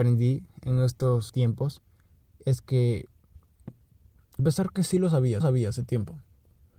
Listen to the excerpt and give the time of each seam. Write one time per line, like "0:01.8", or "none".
0:01.3
0:04.4
0:05.4